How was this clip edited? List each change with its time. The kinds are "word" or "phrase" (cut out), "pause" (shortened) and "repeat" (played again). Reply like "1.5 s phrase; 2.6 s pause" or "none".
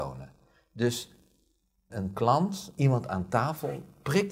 1.9 s word; 2.8 s word